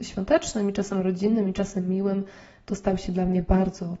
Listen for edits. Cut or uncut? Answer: uncut